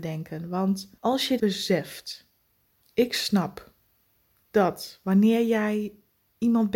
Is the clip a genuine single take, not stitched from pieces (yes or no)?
no